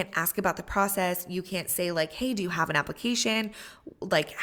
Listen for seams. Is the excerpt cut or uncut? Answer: uncut